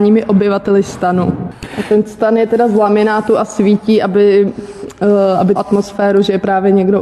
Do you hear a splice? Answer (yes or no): yes